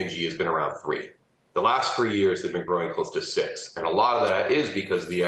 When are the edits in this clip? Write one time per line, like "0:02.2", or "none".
none